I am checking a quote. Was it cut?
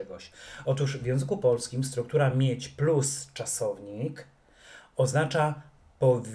no; 0 cuts

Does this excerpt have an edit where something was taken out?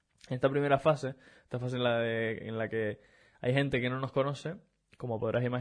no; 0 cuts

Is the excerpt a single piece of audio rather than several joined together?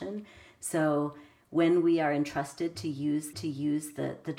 no; 1 cut; at 3.3 s

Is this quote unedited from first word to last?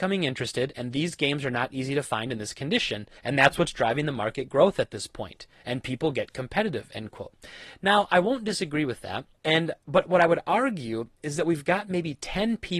no; 2 cuts; at 3.2 s, 9.3 s

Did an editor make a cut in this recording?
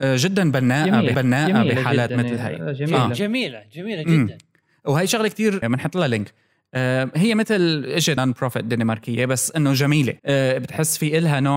yes; 4 cuts; at 1.1 s, 5.6 s, 8.2 s, 10.2 s

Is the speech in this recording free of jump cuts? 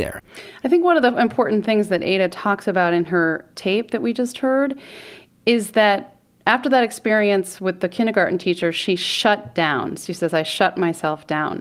yes; 0 cuts

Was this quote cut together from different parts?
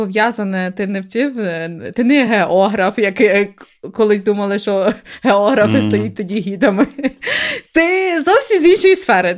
no; 0 cuts

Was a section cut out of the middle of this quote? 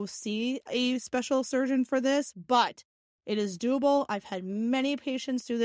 no; 0 cuts

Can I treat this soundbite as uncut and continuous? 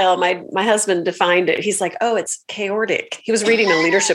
yes; 0 cuts

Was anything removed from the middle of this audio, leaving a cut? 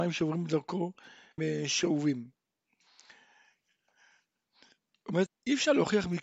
yes; 2 cuts; at 1.4 s, 5.3 s

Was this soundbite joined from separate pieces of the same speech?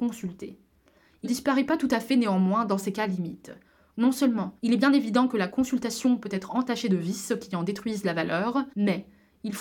yes; 3 cuts; at 1.2 s, 4.6 s, 8.7 s

